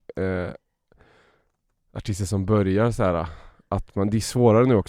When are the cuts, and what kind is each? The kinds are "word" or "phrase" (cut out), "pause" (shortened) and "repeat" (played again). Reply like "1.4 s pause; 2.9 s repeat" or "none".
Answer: none